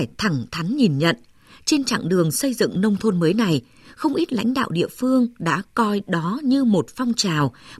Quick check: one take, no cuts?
yes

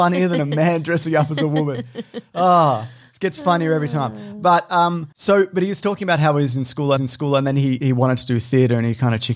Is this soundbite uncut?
no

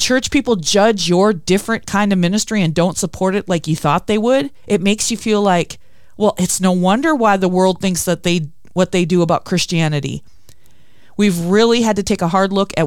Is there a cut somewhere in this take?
no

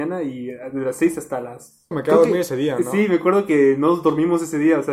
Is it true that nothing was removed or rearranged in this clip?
no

